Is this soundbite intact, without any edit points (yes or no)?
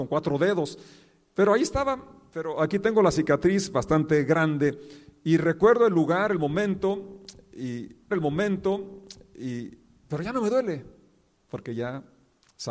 no